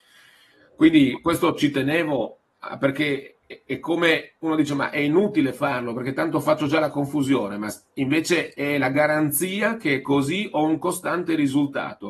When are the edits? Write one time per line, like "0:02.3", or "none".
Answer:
0:03.4